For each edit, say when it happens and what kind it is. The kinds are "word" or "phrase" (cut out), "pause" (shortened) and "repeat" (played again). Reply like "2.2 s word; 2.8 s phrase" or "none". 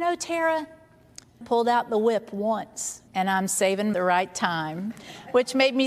1.4 s phrase; 3.1 s pause; 3.9 s phrase